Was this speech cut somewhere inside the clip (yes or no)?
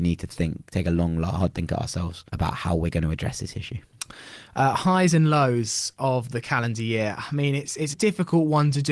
yes